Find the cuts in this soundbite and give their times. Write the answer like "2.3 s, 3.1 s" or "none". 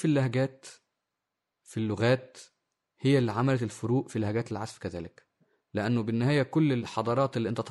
none